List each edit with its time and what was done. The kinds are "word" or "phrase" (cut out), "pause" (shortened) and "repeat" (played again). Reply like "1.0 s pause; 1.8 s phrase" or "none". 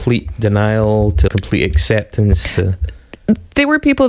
1.3 s word